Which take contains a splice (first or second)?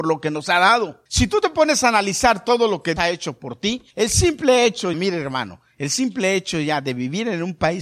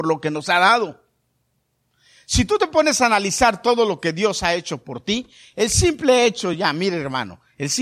first